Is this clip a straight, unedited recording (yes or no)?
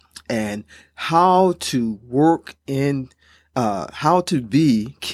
yes